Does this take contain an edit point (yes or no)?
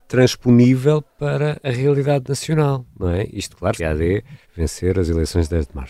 yes